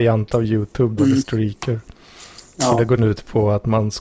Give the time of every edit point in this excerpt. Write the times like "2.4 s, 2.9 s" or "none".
1.0 s, 3.0 s